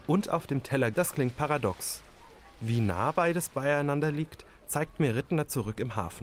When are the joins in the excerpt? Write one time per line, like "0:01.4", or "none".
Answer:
0:00.9